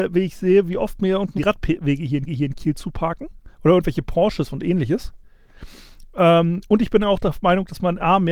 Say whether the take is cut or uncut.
cut